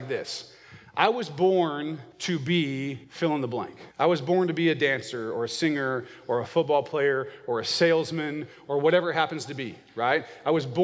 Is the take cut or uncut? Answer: cut